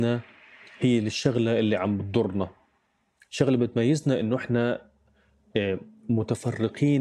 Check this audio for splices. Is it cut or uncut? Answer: uncut